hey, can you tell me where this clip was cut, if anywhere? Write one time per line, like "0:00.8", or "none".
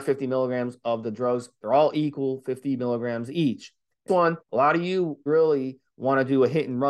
0:04.1
0:04.4
0:05.3